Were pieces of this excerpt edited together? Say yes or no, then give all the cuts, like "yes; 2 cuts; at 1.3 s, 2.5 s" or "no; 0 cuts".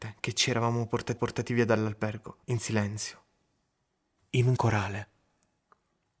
yes; 3 cuts; at 1.2 s, 2.4 s, 4.6 s